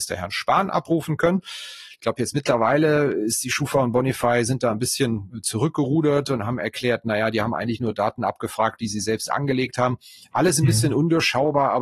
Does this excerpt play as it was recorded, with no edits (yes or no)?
yes